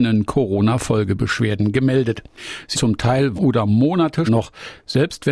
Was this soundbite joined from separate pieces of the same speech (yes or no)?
yes